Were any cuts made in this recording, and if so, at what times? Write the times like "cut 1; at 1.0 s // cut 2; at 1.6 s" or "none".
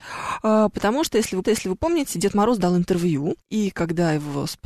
cut 1; at 1.4 s // cut 2; at 3.4 s